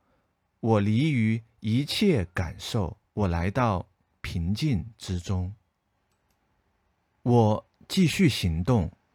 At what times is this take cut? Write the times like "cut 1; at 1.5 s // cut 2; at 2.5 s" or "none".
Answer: cut 1; at 3.0 s